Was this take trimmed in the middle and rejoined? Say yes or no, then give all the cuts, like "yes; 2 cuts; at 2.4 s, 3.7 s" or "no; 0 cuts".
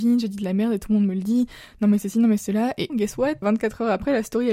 yes; 2 cuts; at 2.9 s, 3.4 s